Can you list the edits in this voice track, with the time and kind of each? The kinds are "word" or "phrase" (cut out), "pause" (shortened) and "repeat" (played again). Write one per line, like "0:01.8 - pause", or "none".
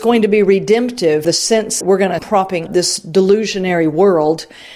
0:01.2 - word
0:01.8 - word
0:02.2 - word
0:02.7 - word